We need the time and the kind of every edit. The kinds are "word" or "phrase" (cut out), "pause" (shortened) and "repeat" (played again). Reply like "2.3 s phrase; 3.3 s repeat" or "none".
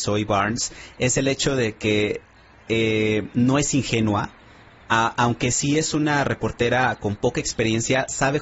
none